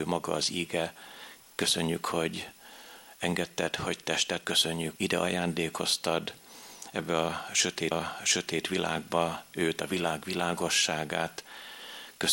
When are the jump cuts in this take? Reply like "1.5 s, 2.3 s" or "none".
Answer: 4.4 s, 5.0 s, 7.9 s

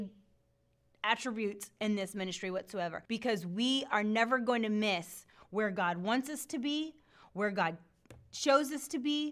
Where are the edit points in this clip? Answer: 3.1 s

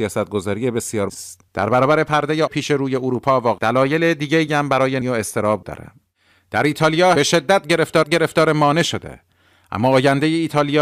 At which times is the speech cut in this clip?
1.1 s, 1.5 s, 2.5 s, 3.6 s, 5.0 s, 5.6 s, 7.2 s, 8.0 s

